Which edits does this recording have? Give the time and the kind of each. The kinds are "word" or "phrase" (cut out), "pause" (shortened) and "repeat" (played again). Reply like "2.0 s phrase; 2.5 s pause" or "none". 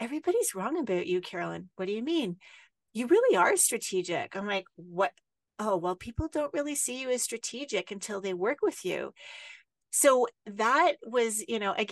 none